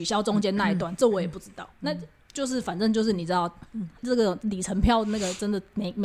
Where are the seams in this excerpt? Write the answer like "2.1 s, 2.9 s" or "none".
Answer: 1.7 s, 4.0 s